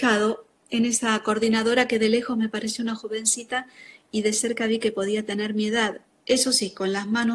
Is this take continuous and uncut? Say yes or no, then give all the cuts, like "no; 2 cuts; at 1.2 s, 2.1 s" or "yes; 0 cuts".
no; 1 cut; at 6.1 s